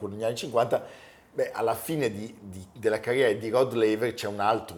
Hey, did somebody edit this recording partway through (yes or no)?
no